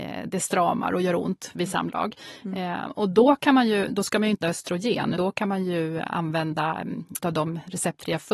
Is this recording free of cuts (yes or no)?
no